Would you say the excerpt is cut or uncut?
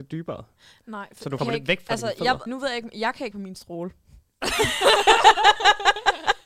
cut